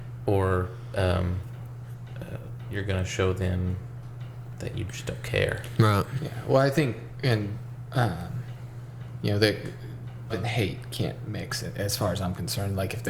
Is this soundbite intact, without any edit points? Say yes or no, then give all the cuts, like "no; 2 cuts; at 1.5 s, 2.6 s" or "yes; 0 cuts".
no; 2 cuts; at 10.3 s, 11.3 s